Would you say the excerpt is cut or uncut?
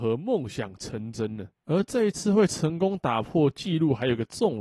cut